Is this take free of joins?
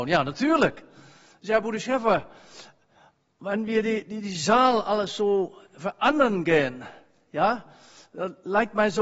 yes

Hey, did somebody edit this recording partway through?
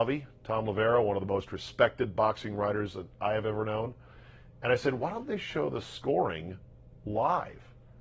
no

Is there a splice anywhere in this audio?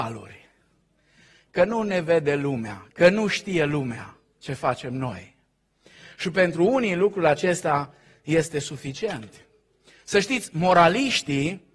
no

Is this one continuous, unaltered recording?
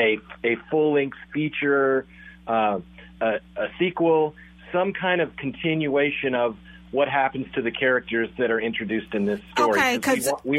yes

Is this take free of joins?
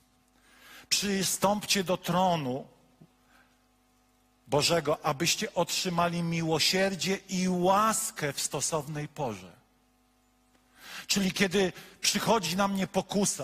yes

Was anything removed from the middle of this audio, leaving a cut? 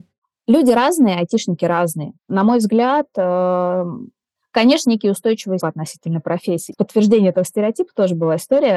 yes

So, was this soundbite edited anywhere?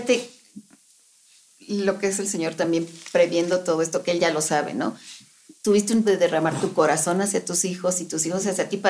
yes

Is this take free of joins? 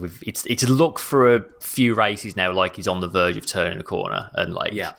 yes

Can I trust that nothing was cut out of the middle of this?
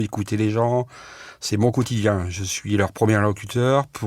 yes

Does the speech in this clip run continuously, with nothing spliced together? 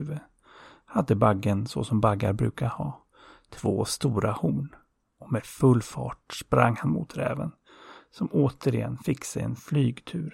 yes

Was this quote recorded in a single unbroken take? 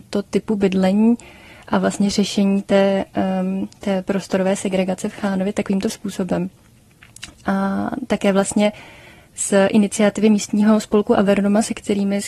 yes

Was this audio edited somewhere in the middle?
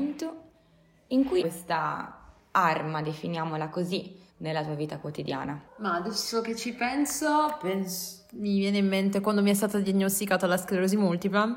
yes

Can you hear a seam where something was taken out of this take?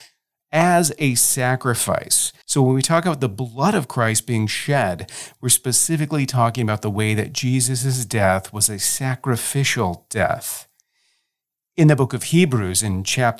yes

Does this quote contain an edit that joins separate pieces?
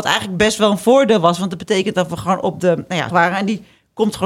yes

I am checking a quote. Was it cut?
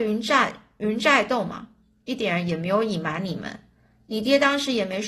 no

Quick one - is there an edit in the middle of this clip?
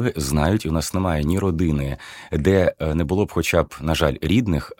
no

